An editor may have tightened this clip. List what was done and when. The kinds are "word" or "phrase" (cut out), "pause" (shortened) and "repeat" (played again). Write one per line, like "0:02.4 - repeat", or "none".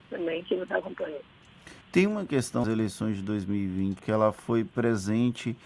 0:01.8 - pause
0:02.6 - word
0:04.0 - phrase